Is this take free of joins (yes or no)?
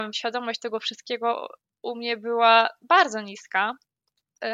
yes